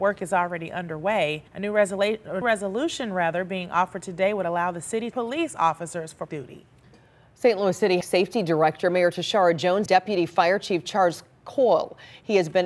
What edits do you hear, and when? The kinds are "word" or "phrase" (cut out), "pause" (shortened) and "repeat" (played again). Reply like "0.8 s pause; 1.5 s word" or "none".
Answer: 1.5 s pause; 2.4 s word; 5.1 s phrase; 6.3 s phrase; 8.0 s phrase; 9.9 s word